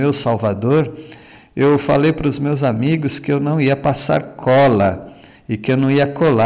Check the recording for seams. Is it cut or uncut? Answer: uncut